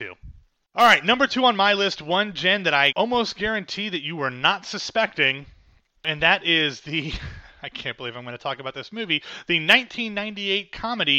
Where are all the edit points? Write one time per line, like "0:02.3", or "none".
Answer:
0:02.9